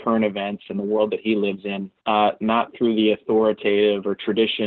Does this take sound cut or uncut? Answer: cut